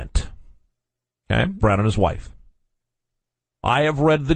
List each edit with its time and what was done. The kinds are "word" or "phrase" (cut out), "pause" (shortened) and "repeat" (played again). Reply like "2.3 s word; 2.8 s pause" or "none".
1.6 s phrase